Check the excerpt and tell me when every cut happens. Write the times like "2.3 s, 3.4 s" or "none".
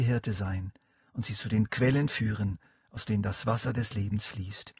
none